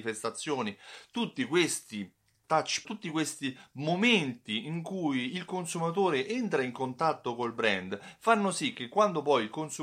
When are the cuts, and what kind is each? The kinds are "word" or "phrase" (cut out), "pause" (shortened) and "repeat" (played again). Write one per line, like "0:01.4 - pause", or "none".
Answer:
0:02.8 - word